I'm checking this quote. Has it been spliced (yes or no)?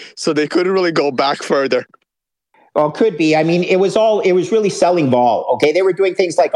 no